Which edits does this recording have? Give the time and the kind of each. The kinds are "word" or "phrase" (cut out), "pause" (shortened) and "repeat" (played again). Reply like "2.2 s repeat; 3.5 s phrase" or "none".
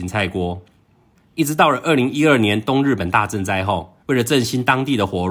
4.0 s pause